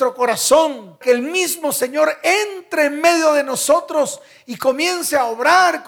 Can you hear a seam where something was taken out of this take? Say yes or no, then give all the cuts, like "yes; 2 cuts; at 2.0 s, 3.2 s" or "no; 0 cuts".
yes; 1 cut; at 1.0 s